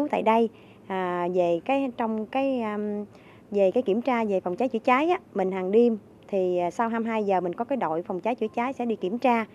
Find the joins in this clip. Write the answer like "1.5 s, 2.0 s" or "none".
none